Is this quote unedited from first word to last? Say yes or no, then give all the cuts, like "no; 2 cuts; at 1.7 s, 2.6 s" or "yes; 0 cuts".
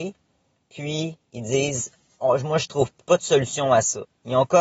no; 1 cut; at 2.1 s